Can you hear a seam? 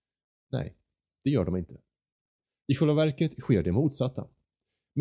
no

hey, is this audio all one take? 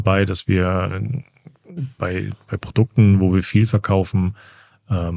yes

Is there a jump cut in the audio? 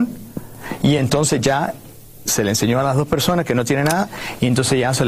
no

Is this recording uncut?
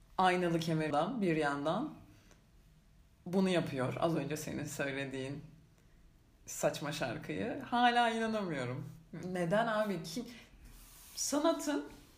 no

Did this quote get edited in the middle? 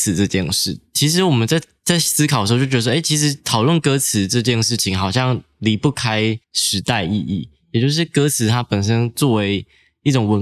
yes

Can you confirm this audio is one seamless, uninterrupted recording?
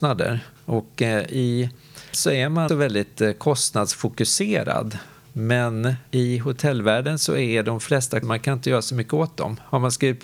no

